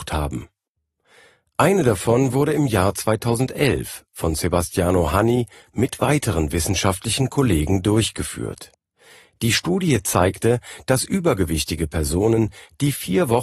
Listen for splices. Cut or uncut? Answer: uncut